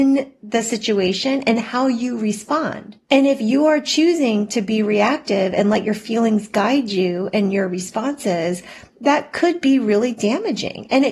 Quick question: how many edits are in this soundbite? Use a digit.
1